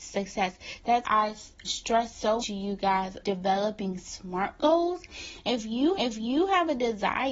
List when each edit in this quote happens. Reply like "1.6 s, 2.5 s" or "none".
1.0 s, 1.6 s, 2.4 s, 3.2 s, 5.9 s